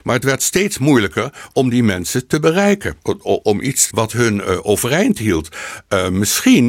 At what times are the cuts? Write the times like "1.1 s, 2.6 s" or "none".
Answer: 3.0 s, 3.4 s, 3.9 s